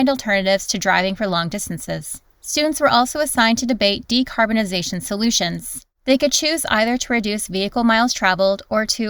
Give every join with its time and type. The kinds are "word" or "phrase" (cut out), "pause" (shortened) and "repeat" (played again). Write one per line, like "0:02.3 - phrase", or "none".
0:02.3 - pause
0:05.9 - pause